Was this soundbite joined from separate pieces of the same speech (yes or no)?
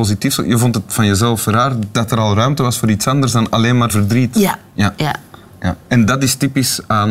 yes